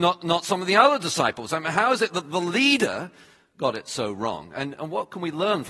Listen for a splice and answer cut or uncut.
uncut